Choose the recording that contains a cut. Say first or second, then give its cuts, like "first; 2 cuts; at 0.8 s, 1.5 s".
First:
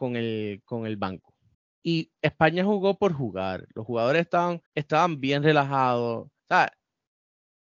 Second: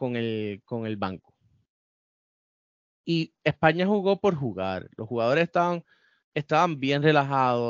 first; 3 cuts; at 1.5 s, 4.7 s, 6.4 s